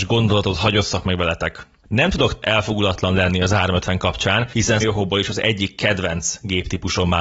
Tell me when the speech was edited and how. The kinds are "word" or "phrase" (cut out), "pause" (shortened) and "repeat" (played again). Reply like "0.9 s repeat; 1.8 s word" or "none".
2.4 s word; 4.8 s phrase